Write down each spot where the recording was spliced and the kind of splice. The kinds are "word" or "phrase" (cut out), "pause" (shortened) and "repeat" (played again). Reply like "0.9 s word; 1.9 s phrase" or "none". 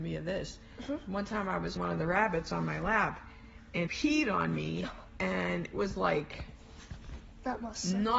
1.8 s word; 3.9 s word; 5.7 s word